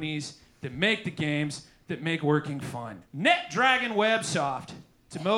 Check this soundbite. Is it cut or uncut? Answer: cut